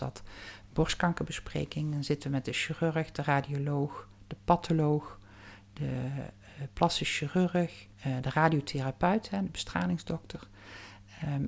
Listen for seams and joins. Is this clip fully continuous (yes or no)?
no